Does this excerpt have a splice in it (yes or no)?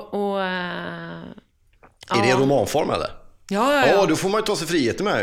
no